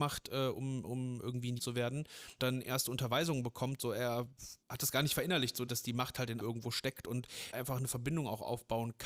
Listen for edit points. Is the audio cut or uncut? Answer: cut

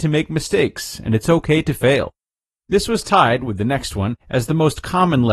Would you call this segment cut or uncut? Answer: cut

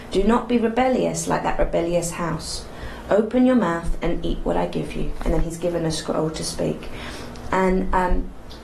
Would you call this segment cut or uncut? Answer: uncut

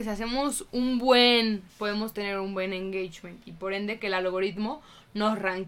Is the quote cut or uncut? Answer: cut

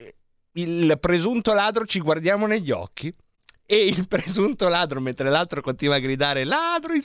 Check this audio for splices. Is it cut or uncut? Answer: uncut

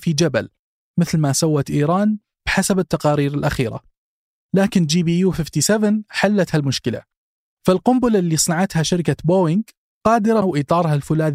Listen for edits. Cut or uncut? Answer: cut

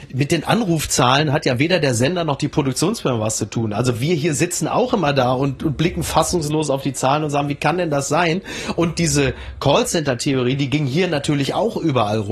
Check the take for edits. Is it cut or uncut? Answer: uncut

